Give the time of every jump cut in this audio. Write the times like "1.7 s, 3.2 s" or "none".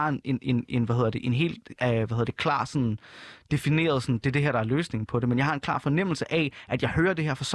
none